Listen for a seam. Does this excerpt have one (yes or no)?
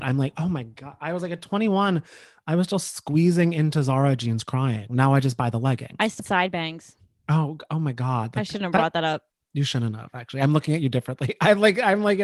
yes